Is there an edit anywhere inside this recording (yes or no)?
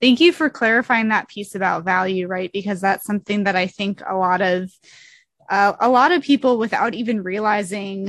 no